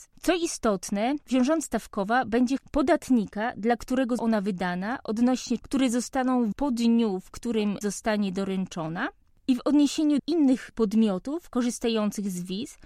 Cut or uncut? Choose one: cut